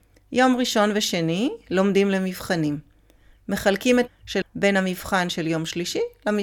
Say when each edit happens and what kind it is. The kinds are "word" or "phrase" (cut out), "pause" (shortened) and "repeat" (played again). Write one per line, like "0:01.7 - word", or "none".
0:04.1 - word
0:04.4 - word